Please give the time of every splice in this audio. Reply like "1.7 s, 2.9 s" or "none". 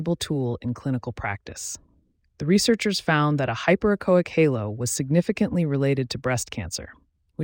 none